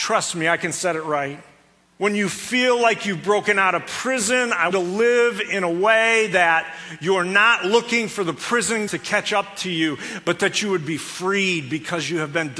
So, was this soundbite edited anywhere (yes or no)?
yes